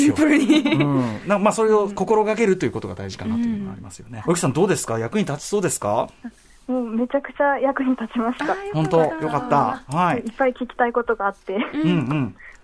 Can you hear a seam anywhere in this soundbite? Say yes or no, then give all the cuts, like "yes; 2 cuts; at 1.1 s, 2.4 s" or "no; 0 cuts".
yes; 1 cut; at 4.2 s